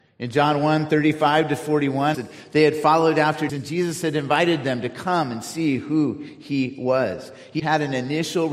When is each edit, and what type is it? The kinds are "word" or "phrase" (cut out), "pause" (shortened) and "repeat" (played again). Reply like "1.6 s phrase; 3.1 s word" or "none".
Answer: 2.1 s phrase; 3.5 s word; 7.6 s word